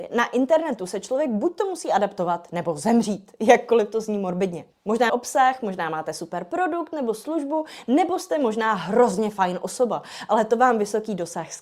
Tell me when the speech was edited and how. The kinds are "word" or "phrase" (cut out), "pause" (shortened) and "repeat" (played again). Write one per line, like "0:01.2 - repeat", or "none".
0:05.1 - phrase